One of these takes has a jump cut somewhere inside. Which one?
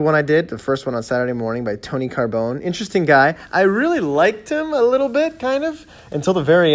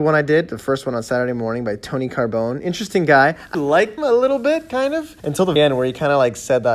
second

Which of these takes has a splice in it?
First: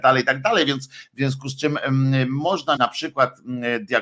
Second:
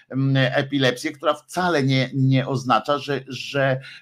first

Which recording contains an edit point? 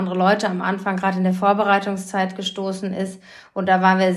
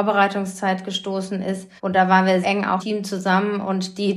second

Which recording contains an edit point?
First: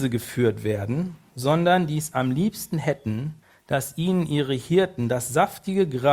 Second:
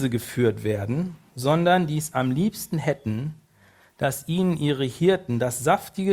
first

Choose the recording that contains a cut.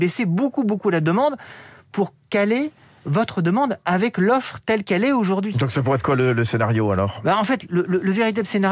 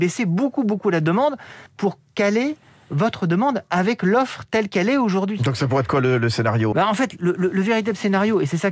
second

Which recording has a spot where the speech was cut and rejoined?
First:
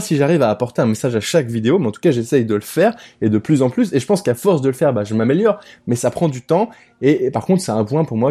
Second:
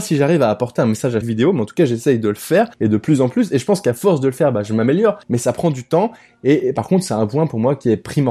second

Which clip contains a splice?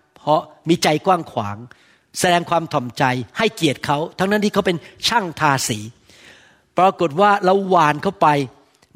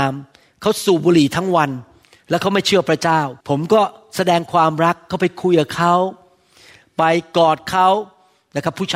second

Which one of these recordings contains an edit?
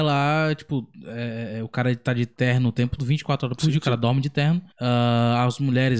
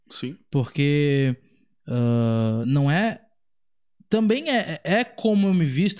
first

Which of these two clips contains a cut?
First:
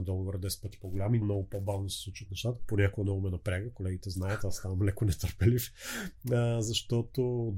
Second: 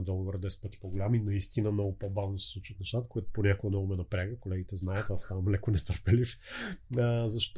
first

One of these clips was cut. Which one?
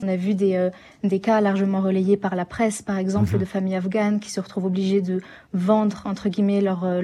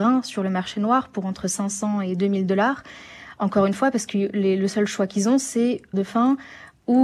second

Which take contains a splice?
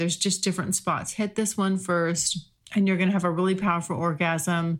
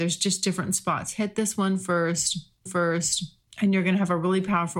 second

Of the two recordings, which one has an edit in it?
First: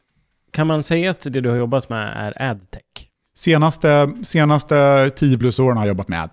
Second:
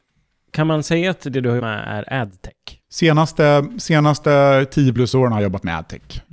second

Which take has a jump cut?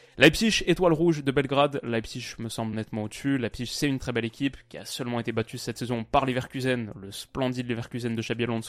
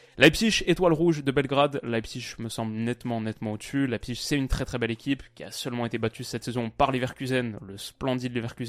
first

